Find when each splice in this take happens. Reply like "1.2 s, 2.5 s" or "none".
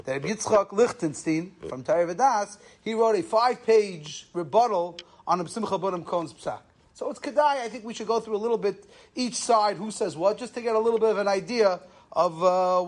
none